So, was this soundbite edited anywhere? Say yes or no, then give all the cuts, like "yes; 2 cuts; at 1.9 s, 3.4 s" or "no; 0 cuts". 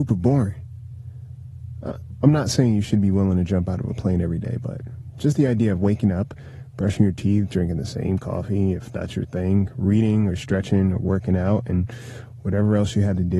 no; 0 cuts